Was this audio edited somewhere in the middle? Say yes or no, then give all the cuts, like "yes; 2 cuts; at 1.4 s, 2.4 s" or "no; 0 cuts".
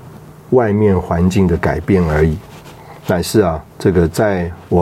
yes; 2 cuts; at 3.0 s, 3.7 s